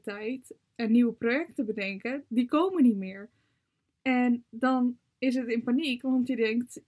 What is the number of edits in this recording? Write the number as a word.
zero